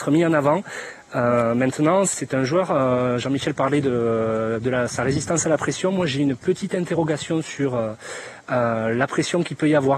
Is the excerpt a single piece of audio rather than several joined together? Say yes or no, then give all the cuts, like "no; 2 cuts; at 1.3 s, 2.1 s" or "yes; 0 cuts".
yes; 0 cuts